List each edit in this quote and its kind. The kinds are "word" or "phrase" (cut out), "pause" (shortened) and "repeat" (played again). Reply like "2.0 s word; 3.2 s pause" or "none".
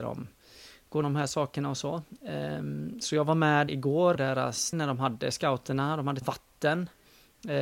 1.0 s word; 3.7 s word; 4.2 s word; 4.7 s word; 6.2 s word